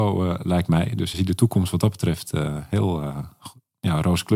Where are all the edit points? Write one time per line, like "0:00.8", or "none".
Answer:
0:01.1